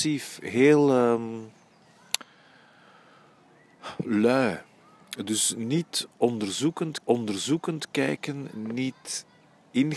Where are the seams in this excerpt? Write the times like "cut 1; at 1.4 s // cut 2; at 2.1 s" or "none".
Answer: cut 1; at 7.0 s